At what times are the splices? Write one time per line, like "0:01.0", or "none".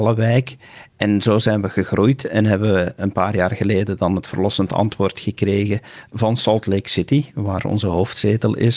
0:00.9